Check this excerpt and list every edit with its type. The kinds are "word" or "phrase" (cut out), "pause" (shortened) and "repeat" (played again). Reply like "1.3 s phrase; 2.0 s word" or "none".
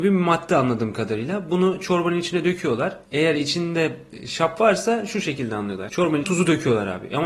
6.2 s word